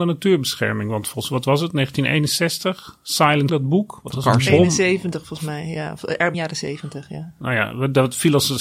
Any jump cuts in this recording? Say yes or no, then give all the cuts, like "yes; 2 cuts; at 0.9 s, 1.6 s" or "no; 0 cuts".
yes; 2 cuts; at 3.5 s, 6.3 s